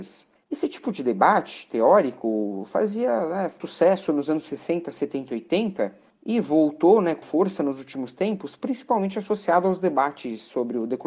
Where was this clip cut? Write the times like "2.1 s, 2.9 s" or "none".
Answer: 3.6 s, 7.2 s